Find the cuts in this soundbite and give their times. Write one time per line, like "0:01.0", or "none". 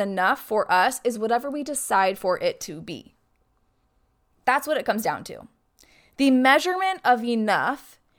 none